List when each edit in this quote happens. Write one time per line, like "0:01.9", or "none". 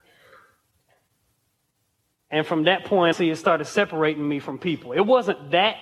0:03.1